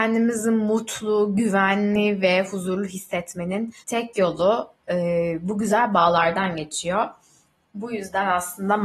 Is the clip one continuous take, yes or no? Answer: no